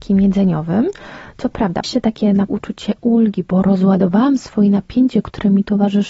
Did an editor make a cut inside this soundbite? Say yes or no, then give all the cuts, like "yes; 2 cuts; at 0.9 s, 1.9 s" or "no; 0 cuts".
yes; 2 cuts; at 1.8 s, 2.5 s